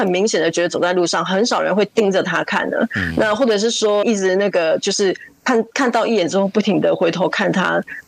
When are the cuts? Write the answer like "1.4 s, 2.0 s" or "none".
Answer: 4.0 s